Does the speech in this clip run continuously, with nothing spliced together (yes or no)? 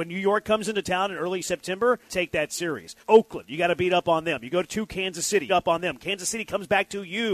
no